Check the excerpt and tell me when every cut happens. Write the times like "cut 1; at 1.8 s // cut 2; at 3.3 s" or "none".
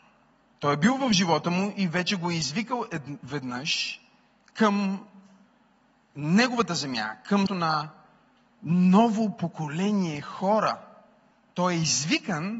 cut 1; at 7.5 s